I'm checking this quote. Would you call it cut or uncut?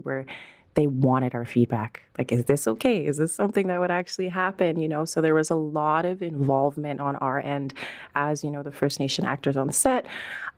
uncut